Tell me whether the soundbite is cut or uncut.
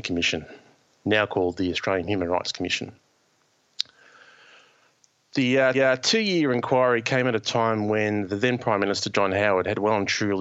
cut